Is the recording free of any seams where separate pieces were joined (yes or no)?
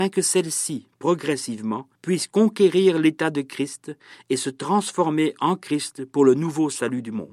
no